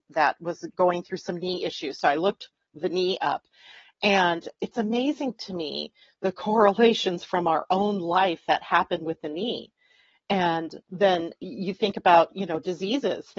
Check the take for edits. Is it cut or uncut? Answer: uncut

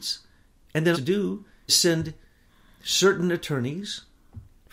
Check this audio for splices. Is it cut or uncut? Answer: cut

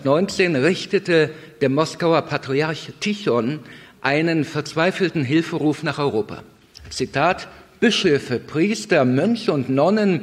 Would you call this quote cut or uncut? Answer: uncut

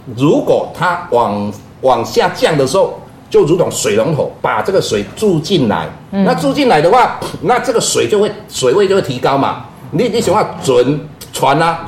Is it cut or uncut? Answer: cut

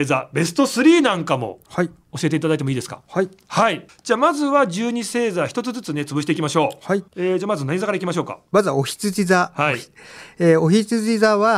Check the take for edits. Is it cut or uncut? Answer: cut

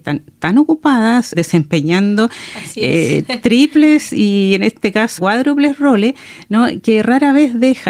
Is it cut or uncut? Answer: cut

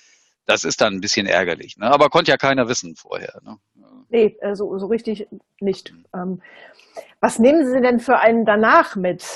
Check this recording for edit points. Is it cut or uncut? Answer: uncut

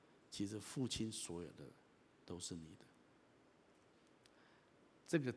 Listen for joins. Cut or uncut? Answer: uncut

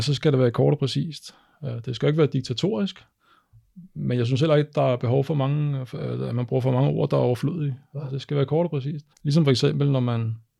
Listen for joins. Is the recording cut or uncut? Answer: cut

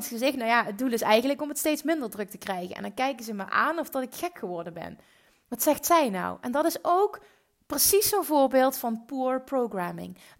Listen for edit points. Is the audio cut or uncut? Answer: uncut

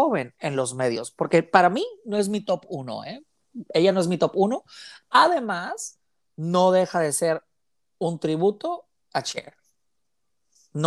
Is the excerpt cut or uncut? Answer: uncut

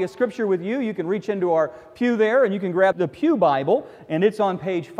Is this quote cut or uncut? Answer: cut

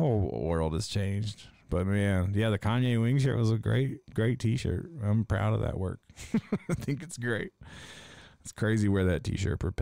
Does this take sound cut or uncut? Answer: uncut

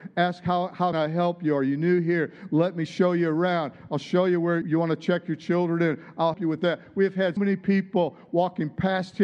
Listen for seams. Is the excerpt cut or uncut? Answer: cut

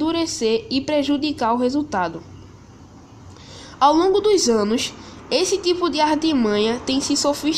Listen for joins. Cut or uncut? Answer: uncut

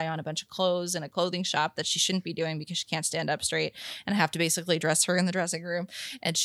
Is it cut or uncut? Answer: uncut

